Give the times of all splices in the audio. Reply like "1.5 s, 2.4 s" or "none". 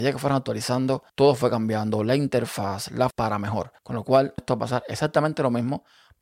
1.1 s, 3.1 s, 3.8 s, 4.4 s